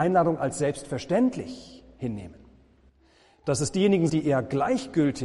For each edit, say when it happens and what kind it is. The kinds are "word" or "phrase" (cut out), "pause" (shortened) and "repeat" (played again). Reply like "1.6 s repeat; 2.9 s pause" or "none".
4.1 s word